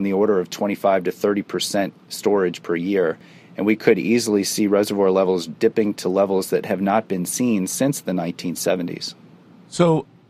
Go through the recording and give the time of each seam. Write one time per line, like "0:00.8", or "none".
none